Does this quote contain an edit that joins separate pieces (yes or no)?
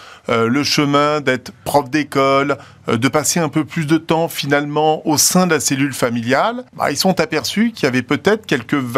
yes